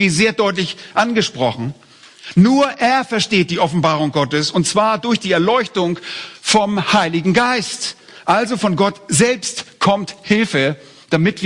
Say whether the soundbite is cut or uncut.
uncut